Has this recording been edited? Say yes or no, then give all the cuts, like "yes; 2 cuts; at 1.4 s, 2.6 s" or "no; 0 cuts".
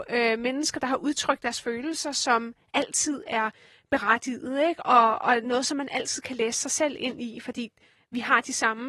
no; 0 cuts